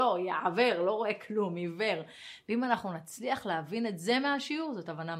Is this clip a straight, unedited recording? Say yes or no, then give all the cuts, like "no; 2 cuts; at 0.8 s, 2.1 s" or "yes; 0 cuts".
yes; 0 cuts